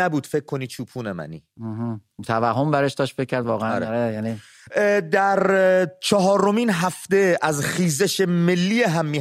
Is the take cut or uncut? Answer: uncut